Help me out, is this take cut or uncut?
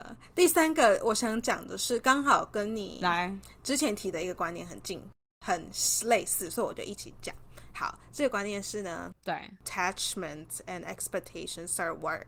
uncut